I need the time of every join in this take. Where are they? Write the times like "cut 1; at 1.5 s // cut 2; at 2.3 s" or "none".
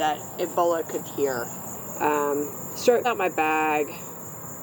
cut 1; at 1.0 s // cut 2; at 3.0 s